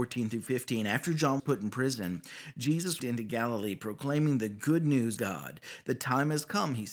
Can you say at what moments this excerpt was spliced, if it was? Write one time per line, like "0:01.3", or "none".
0:01.4
0:03.0
0:05.2